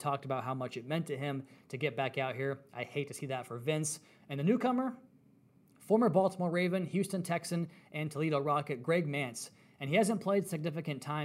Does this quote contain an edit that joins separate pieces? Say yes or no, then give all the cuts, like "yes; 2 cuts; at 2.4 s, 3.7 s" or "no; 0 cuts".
no; 0 cuts